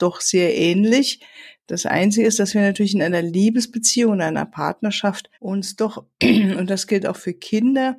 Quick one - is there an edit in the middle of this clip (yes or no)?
yes